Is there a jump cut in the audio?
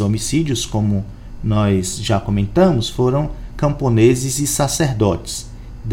no; 0 cuts

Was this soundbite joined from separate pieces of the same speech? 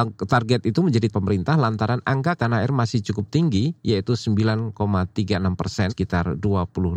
yes; 3 cuts; at 1.1 s, 2.4 s, 5.9 s

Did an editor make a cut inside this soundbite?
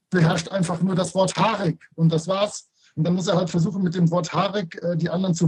no; 0 cuts

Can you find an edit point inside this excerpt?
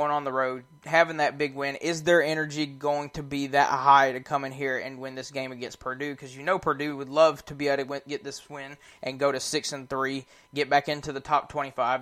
no; 0 cuts

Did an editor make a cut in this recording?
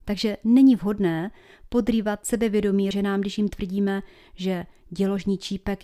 yes; 1 cut; at 2.9 s

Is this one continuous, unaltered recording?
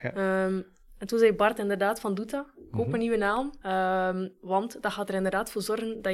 no; 1 cut; at 3.6 s

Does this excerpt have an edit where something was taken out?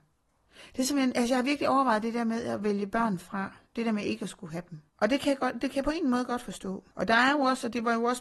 yes; 3 cuts; at 3.7 s, 4.9 s, 6.9 s

